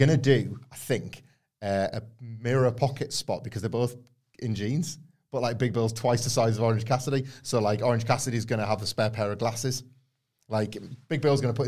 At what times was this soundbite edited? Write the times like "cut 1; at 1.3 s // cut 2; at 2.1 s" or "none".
none

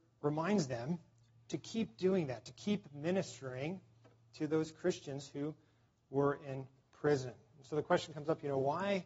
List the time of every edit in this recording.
none

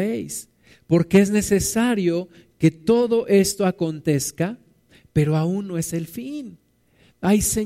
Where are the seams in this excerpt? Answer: none

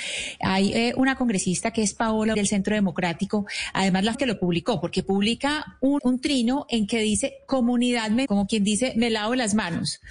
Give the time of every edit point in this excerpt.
cut 1; at 2.3 s // cut 2; at 4.1 s // cut 3; at 6.0 s // cut 4; at 8.3 s

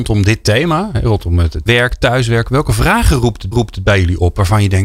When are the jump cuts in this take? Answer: cut 1; at 1.7 s // cut 2; at 3.5 s

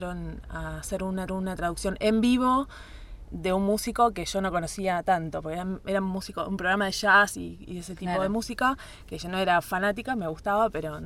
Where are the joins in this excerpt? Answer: cut 1; at 1.3 s

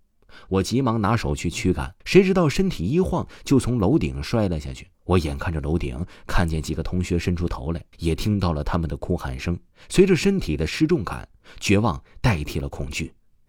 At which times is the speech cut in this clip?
cut 1; at 2.0 s // cut 2; at 4.9 s // cut 3; at 7.9 s // cut 4; at 9.7 s

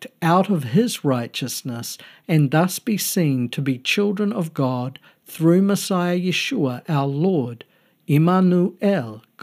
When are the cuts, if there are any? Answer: none

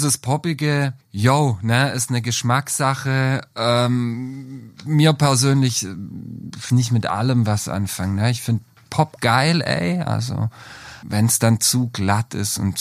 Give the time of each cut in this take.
cut 1; at 1.0 s // cut 2; at 6.7 s // cut 3; at 9.2 s // cut 4; at 11.0 s

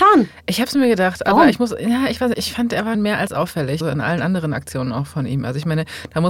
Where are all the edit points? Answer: cut 1; at 2.3 s // cut 2; at 2.9 s // cut 3; at 3.8 s

